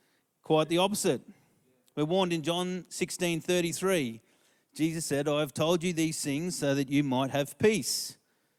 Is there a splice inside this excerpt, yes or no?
no